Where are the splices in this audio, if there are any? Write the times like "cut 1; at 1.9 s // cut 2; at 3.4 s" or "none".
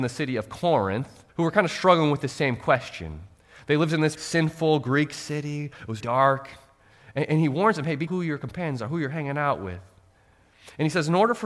cut 1; at 1.3 s // cut 2; at 4.1 s // cut 3; at 6.0 s // cut 4; at 8.1 s